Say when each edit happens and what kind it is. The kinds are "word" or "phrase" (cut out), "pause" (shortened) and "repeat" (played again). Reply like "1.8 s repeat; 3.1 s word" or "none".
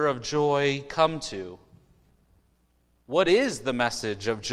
none